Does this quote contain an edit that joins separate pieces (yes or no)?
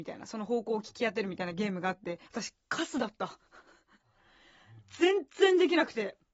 yes